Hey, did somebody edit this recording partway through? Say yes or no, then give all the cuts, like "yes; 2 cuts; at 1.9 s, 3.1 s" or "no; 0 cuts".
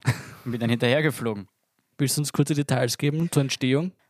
no; 0 cuts